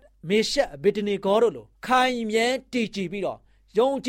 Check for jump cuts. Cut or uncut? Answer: cut